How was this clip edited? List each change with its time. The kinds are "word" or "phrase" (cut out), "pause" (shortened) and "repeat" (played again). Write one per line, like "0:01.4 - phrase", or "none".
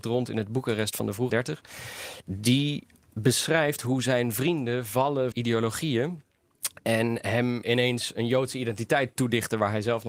0:01.3 - word
0:05.3 - word
0:07.6 - word